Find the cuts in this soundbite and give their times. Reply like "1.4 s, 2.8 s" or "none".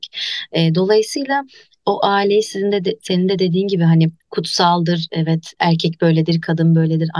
4.2 s, 5.5 s